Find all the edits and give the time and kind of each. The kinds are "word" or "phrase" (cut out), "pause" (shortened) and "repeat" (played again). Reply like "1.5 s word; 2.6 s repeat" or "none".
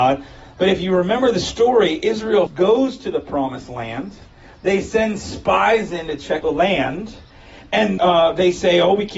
2.5 s word; 6.4 s word; 8.0 s word